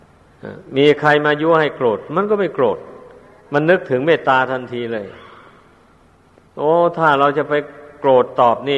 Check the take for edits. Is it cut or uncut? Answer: uncut